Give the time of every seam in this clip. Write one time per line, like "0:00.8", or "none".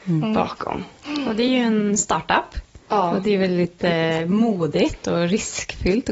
none